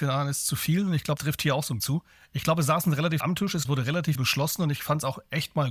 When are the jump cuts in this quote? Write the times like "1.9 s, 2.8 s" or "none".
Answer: 1.2 s, 1.8 s, 3.2 s, 3.6 s, 4.1 s